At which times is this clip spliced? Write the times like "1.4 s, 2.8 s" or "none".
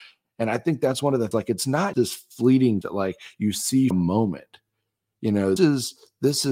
1.3 s, 1.9 s, 2.8 s, 3.9 s, 5.6 s